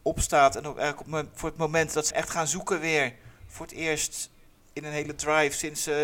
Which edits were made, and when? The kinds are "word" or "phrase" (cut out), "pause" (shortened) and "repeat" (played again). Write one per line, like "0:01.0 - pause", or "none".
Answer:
0:02.1 - word